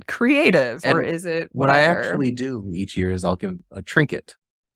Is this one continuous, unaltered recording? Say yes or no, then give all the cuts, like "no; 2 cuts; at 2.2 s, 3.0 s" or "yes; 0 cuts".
yes; 0 cuts